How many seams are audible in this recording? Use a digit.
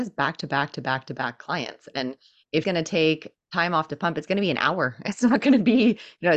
1